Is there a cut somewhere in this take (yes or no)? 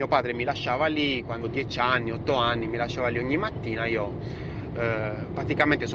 yes